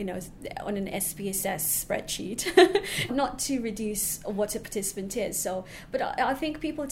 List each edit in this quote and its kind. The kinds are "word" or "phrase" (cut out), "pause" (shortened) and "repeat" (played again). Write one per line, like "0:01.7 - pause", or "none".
0:03.1 - word